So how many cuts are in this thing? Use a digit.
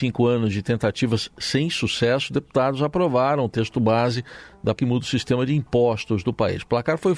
1